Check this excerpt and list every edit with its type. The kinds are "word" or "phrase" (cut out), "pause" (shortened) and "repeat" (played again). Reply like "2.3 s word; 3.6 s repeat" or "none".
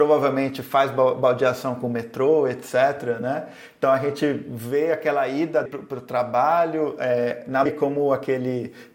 5.7 s word; 7.7 s word

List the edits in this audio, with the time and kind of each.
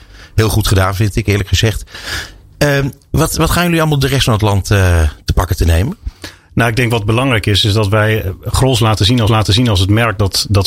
4.0 s phrase; 9.3 s repeat

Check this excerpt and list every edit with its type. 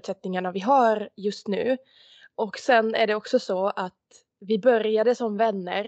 none

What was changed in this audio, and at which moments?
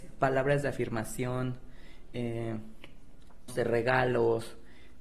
3.5 s word

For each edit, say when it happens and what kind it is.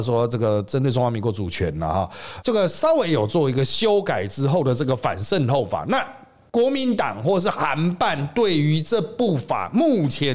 2.4 s word

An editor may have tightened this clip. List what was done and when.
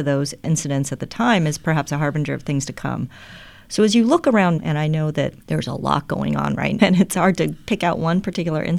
4.6 s word; 6.8 s word

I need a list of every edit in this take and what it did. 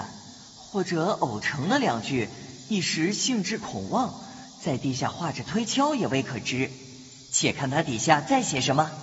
none

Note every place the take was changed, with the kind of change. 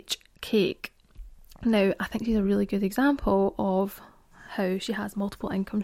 none

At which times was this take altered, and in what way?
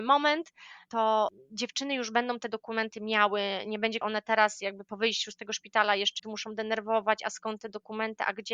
4.0 s phrase; 6.2 s word

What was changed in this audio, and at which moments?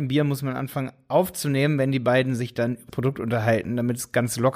2.9 s word

